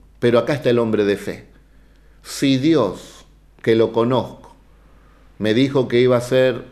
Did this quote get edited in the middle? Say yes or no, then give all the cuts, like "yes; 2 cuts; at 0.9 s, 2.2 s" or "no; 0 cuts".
no; 0 cuts